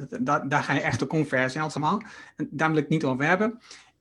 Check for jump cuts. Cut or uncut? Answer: cut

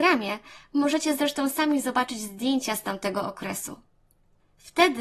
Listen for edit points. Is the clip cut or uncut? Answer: uncut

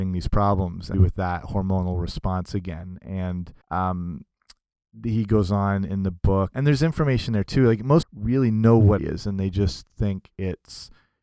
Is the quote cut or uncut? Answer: cut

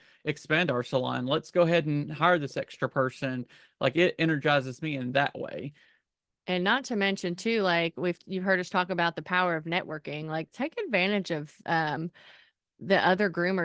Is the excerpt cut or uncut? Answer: uncut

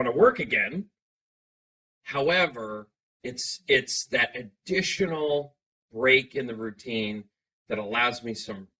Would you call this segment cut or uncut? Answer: uncut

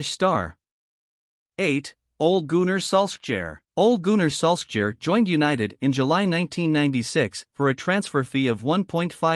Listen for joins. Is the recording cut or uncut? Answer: cut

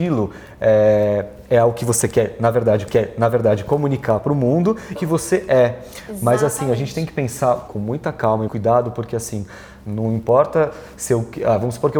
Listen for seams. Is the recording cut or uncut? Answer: cut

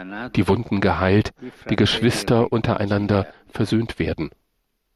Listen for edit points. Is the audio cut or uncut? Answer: uncut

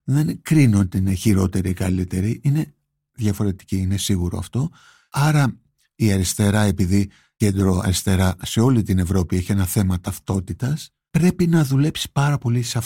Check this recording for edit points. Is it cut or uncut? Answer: uncut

